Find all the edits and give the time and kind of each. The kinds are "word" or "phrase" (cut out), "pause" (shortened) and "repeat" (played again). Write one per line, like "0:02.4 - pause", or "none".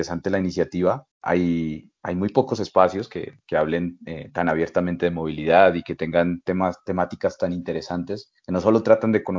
0:01.1 - pause
0:08.4 - pause